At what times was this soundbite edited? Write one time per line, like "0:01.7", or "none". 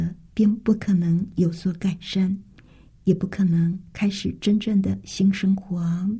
none

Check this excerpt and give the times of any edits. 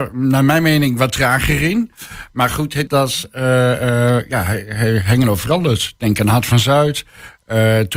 0:02.9

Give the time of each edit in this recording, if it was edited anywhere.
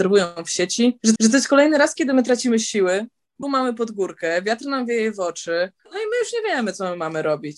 0:01.2
0:03.4
0:05.8

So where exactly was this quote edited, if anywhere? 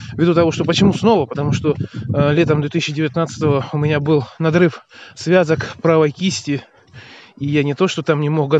none

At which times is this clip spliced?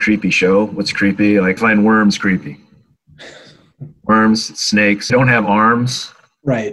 0:01.6
0:05.1

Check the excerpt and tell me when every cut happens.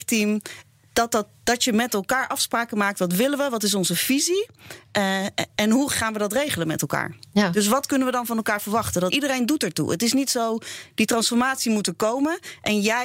0:09.1

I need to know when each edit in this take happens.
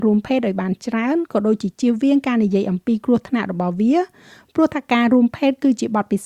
none

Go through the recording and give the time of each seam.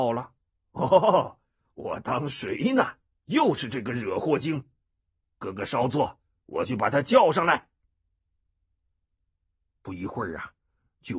none

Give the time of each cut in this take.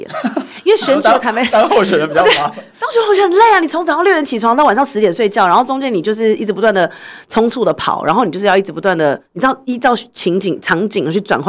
0:09.3

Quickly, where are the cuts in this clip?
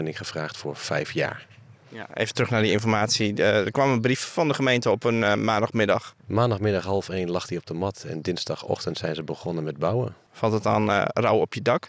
0:06.2

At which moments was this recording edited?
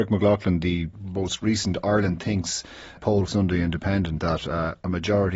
0:00.9
0:03.0
0:03.3
0:04.2

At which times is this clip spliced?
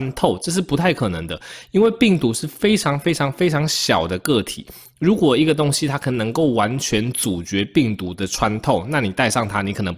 none

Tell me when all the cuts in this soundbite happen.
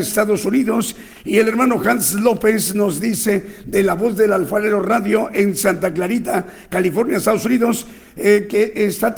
none

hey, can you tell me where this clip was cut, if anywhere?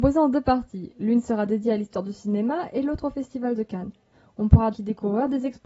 0:04.7

